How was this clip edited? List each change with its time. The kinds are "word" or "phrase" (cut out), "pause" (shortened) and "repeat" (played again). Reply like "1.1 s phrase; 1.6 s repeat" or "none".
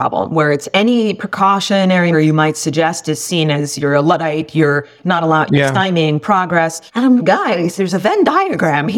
2.1 s word; 6.9 s pause; 7.2 s word